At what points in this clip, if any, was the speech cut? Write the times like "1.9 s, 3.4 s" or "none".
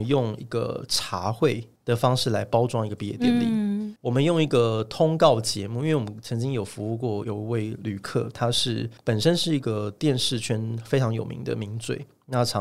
9.0 s